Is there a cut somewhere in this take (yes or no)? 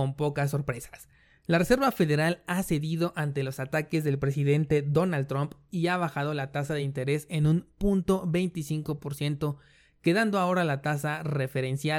no